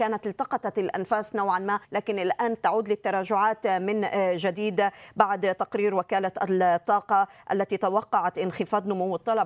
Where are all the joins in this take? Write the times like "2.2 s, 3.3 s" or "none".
1.8 s